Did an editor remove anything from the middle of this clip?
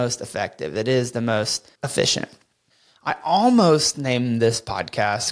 yes; 1 cut; at 1.8 s

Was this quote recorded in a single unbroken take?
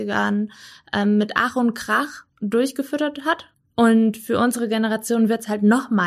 no; 2 cuts; at 2.3 s, 3.5 s

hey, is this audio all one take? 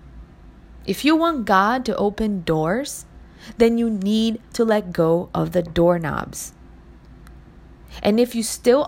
yes; 0 cuts

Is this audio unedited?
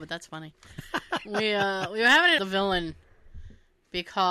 no; 1 cut; at 2.4 s

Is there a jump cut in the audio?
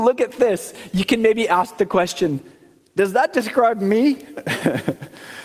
no; 0 cuts

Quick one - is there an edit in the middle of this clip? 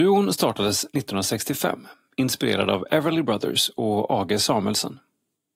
no; 0 cuts

